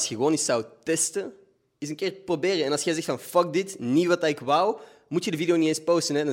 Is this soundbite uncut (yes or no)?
yes